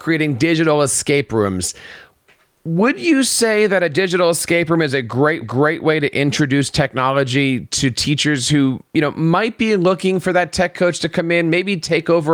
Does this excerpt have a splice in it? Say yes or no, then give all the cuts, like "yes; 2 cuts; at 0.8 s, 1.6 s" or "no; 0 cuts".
yes; 1 cut; at 5.4 s